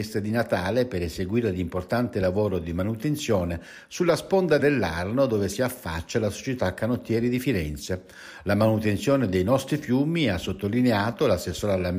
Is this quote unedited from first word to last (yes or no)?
no